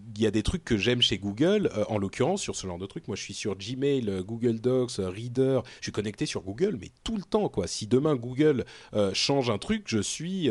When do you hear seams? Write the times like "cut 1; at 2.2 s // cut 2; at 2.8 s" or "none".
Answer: none